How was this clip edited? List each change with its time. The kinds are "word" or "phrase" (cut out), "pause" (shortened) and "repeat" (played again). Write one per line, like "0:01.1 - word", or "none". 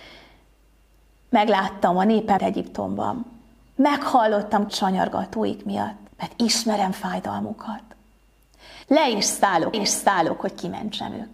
0:02.4 - word
0:04.7 - word
0:06.1 - pause
0:08.8 - pause
0:09.7 - repeat